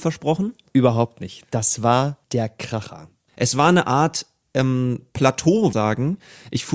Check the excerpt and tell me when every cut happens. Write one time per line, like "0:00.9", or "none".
0:02.2
0:05.7

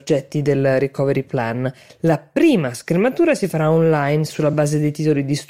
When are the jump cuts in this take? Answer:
none

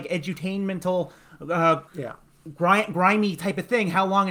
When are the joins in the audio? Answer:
0:01.9

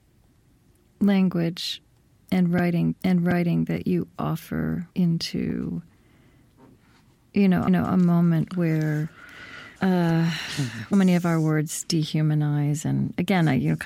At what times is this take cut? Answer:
0:02.9
0:04.9
0:07.7
0:09.8
0:10.9

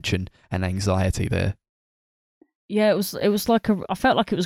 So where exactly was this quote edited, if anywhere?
none

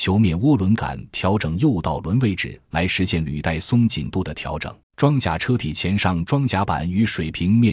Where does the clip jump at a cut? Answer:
0:04.8

